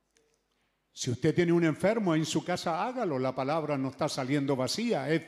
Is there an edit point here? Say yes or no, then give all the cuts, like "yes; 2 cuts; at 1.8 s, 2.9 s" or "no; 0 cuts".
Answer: no; 0 cuts